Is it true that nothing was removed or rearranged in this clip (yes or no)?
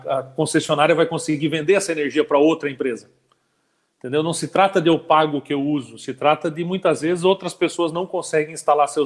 yes